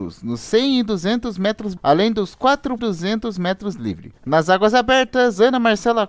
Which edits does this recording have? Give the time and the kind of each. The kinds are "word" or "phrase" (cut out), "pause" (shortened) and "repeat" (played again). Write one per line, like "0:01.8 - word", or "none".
0:01.8 - word
0:02.8 - word
0:04.2 - pause